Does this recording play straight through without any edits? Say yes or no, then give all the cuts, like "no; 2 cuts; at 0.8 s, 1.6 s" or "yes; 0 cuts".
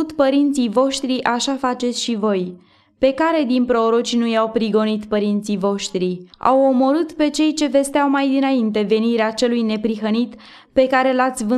no; 1 cut; at 6.3 s